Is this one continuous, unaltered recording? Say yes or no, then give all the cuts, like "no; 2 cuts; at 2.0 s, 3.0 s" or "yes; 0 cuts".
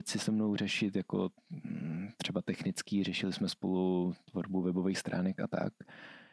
yes; 0 cuts